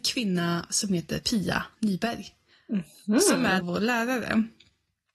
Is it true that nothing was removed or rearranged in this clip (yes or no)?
no